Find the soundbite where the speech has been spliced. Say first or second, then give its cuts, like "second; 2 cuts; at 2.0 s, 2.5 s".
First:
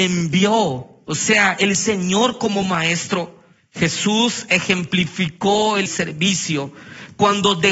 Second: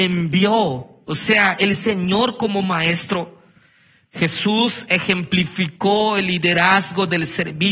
first; 2 cuts; at 3.6 s, 5.9 s